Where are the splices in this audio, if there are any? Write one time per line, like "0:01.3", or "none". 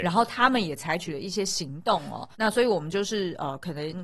0:02.3